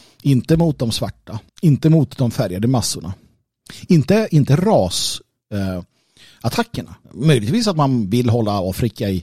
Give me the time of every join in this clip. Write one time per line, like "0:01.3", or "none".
0:01.5
0:07.0